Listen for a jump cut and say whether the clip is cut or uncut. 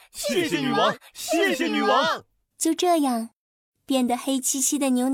uncut